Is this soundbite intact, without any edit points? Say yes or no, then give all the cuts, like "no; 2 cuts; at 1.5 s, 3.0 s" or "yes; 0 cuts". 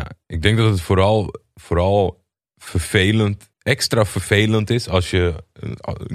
no; 1 cut; at 3.5 s